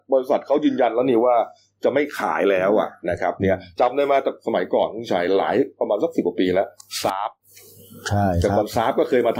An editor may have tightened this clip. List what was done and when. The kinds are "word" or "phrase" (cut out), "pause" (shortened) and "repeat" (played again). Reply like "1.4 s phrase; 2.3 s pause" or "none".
none

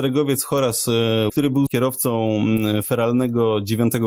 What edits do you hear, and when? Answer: 1.3 s word; 1.7 s word

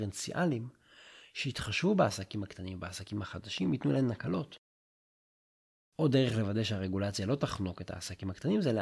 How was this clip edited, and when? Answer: none

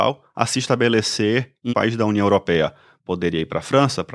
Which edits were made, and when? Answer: 1.7 s word

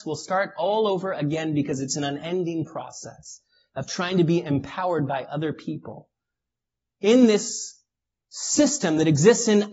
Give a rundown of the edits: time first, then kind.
none

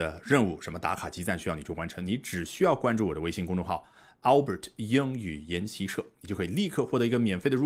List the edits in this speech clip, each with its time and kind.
none

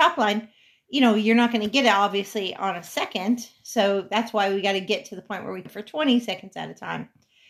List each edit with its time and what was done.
5.7 s word

